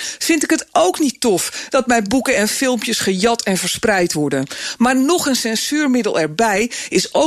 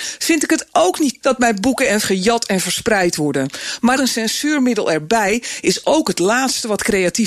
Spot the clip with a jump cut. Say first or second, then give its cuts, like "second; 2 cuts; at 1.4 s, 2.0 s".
second; 3 cuts; at 1.2 s, 2.0 s, 4.0 s